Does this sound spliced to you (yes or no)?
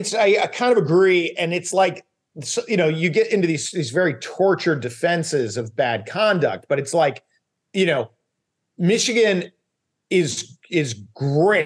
no